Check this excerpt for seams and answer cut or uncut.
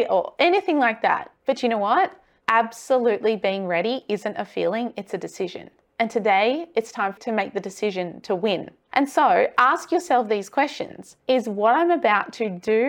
cut